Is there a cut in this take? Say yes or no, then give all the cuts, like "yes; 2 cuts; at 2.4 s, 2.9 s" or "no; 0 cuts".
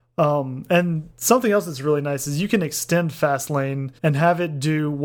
yes; 2 cuts; at 1.1 s, 4.0 s